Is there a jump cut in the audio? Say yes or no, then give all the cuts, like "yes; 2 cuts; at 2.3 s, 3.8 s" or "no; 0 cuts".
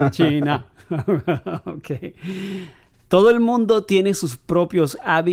no; 0 cuts